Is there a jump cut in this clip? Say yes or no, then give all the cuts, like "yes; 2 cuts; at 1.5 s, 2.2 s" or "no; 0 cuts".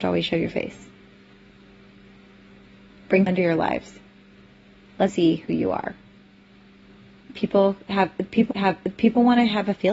yes; 4 cuts; at 3.3 s, 5.1 s, 7.0 s, 8.5 s